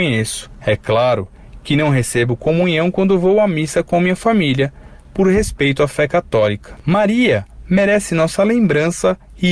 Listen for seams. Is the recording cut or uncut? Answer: uncut